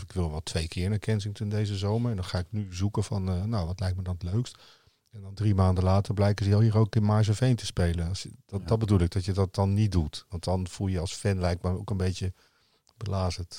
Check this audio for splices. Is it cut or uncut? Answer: uncut